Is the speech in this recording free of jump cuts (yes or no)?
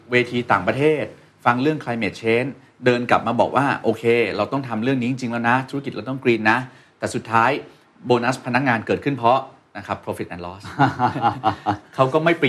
yes